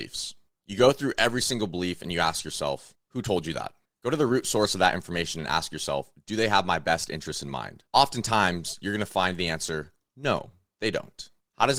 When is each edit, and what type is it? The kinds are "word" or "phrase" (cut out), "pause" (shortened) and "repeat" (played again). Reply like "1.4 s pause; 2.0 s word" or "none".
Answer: 7.9 s pause